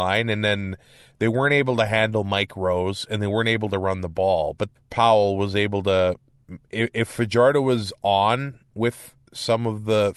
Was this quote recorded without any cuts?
no; 1 cut; at 4.7 s

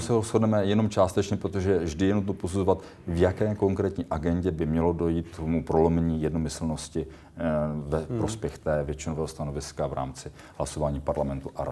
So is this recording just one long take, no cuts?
yes; 0 cuts

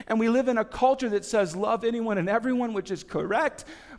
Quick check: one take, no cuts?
yes; 0 cuts

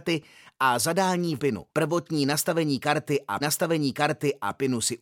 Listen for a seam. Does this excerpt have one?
yes; 3 cuts; at 1.4 s, 1.7 s, 3.4 s

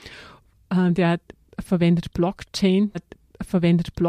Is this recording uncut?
no; 1 cut; at 2.9 s

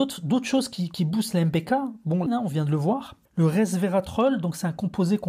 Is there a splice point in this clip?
yes; 2 cuts; at 2.3 s, 3.3 s

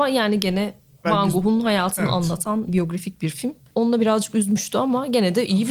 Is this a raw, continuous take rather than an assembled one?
no; 3 cuts; at 1.0 s, 2.7 s, 4.0 s

